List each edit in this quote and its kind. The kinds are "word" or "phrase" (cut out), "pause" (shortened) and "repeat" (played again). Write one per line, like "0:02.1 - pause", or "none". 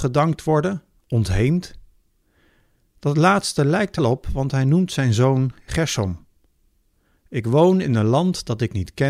0:04.0 - word